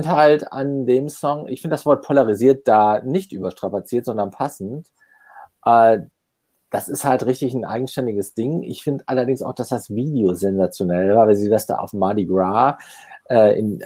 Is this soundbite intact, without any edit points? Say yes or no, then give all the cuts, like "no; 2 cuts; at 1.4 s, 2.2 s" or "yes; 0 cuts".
yes; 0 cuts